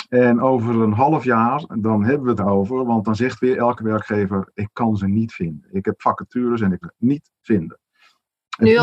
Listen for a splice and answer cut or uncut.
cut